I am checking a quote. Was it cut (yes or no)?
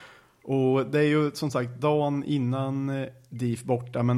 no